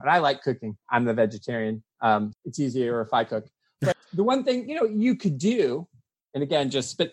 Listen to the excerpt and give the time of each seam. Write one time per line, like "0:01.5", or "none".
0:02.3
0:03.9